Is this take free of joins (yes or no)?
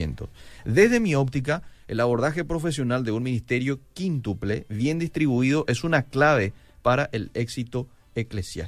yes